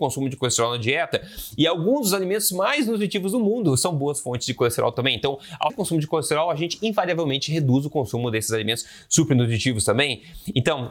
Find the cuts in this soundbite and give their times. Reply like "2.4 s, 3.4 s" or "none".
5.7 s